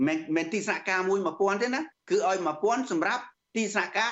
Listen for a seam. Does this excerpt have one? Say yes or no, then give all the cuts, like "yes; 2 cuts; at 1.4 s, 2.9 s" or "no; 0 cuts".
yes; 1 cut; at 2.0 s